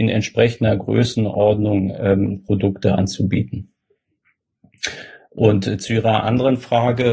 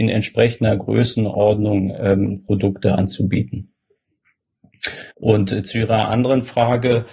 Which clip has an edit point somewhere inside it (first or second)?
second